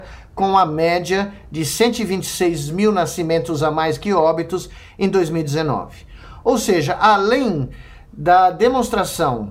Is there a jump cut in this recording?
no; 0 cuts

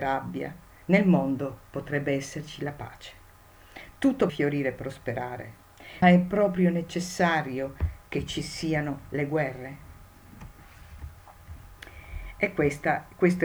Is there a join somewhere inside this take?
yes; 2 cuts; at 4.3 s, 6.0 s

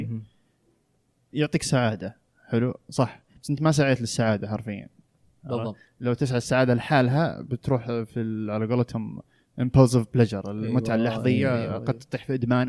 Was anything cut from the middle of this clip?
no; 0 cuts

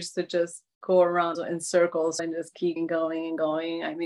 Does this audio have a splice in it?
yes; 3 cuts; at 1.3 s, 2.2 s, 2.8 s

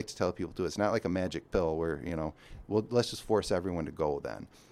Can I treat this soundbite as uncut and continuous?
yes; 0 cuts

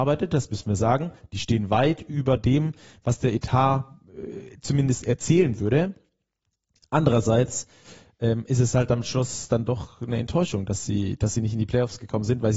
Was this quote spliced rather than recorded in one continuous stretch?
no; 0 cuts

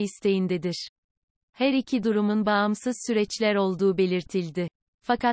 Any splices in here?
no; 0 cuts

